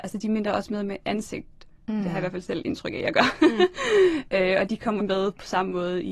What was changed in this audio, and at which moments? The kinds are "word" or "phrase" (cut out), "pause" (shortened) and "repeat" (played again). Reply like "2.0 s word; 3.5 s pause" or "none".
5.0 s word